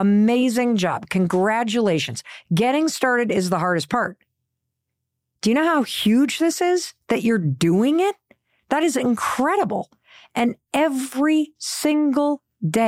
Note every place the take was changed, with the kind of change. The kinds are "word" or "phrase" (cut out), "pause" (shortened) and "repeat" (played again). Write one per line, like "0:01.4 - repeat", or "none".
none